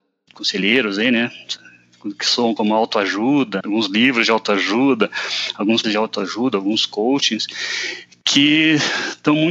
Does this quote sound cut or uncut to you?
cut